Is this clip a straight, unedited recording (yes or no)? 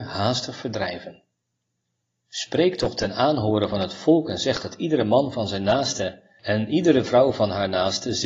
yes